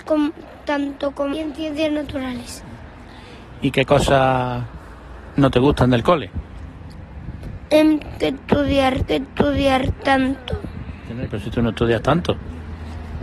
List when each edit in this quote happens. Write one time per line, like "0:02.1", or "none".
0:01.3
0:08.2
0:09.1
0:11.3